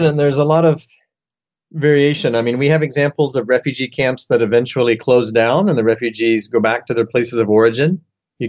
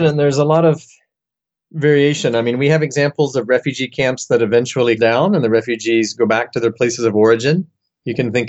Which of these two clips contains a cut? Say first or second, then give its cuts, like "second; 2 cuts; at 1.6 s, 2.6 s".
second; 1 cut; at 5.0 s